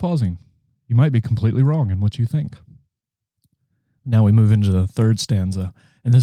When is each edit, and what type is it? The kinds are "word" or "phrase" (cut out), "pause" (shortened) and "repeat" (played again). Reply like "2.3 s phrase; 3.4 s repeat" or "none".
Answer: none